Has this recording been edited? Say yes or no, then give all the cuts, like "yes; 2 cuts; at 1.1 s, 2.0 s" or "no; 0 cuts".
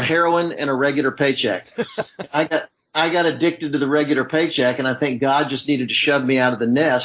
no; 0 cuts